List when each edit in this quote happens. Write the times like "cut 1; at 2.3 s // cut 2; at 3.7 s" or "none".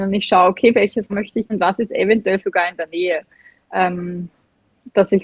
cut 1; at 1.1 s // cut 2; at 1.5 s // cut 3; at 2.4 s